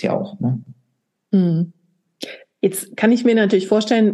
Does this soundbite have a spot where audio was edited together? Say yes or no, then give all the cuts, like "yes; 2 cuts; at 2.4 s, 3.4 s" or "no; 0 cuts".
no; 0 cuts